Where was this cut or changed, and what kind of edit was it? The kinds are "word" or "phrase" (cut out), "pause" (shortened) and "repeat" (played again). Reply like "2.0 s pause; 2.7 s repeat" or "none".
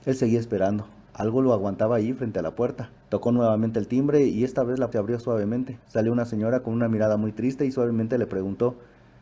3.0 s pause; 4.9 s phrase; 5.8 s pause